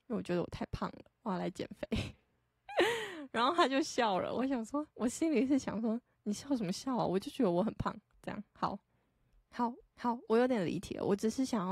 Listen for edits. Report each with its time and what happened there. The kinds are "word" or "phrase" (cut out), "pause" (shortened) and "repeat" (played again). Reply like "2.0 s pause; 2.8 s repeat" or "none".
4.9 s pause; 9.8 s repeat